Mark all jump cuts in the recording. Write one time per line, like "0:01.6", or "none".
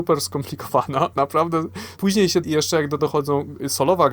0:01.1
0:02.0
0:02.4
0:03.0

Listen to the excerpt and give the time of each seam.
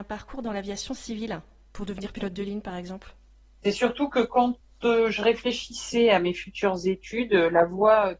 none

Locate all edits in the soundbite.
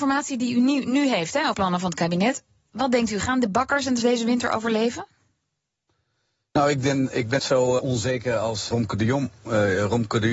0:01.5
0:04.0
0:07.4
0:07.8
0:08.7

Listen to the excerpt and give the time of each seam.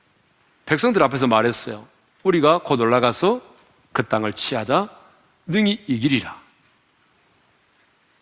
none

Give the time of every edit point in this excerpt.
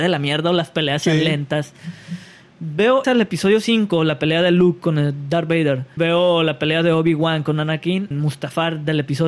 0:03.0
0:06.0
0:08.1

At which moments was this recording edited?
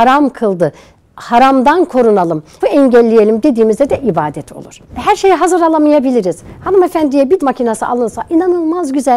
0:02.6
0:04.8
0:07.4

